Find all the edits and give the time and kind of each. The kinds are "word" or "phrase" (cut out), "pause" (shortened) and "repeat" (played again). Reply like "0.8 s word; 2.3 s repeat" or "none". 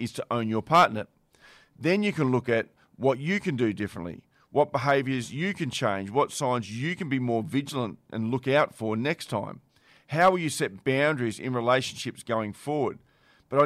none